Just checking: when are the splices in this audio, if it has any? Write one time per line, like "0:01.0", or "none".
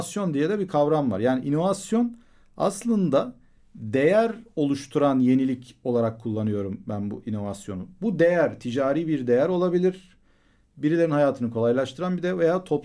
none